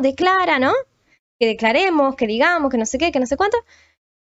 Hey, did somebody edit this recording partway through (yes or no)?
no